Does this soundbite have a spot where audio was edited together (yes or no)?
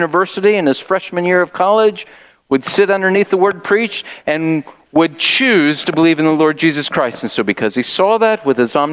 no